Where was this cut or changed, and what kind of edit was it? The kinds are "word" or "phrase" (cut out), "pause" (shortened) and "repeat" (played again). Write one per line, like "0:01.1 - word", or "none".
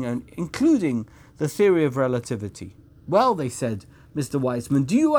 none